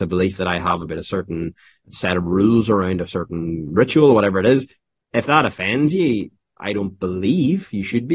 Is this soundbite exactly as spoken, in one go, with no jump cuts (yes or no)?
no